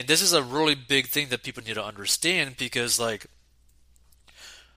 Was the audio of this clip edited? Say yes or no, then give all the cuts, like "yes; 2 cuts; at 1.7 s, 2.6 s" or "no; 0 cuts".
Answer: no; 0 cuts